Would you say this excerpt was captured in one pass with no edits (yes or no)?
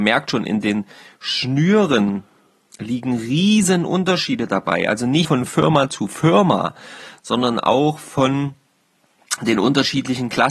no